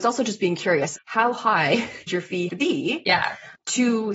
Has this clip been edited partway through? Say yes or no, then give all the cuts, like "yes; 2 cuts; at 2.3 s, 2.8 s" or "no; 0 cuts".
yes; 3 cuts; at 0.9 s, 2.1 s, 2.5 s